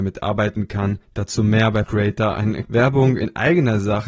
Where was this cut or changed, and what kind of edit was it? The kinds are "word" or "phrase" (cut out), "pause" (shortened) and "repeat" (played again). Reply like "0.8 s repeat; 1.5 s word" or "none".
1.0 s pause; 1.8 s word; 2.6 s word